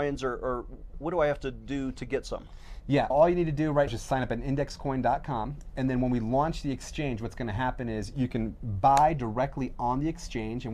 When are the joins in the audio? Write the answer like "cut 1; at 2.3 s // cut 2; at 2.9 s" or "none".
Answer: cut 1; at 0.9 s // cut 2; at 3.1 s // cut 3; at 3.9 s